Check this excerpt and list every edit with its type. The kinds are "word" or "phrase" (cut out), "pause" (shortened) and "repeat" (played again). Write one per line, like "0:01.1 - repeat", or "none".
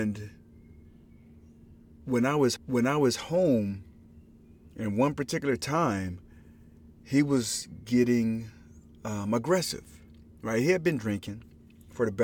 0:02.6 - repeat